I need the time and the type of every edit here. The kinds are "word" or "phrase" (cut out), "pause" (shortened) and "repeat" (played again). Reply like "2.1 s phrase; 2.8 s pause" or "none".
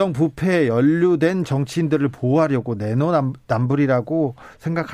none